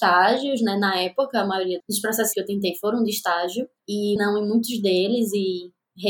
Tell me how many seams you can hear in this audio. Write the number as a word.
three